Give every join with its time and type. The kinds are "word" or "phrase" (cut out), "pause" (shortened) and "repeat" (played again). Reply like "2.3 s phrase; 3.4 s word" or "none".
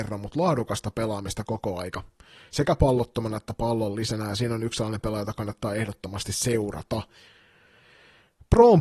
none